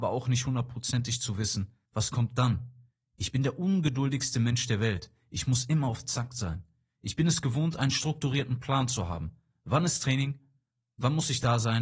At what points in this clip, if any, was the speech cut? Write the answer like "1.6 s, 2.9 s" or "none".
1.9 s

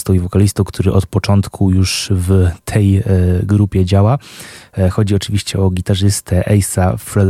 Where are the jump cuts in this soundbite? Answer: none

